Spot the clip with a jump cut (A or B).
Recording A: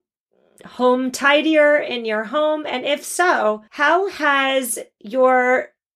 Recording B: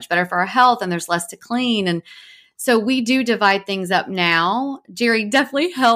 A